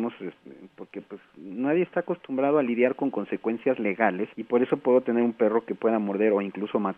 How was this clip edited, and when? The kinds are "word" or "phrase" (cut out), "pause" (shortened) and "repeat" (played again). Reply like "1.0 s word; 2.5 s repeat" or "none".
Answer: 4.3 s pause